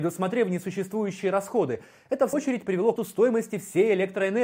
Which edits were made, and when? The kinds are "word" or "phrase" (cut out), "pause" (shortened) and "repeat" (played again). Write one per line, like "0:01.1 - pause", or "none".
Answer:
0:02.3 - word
0:03.0 - word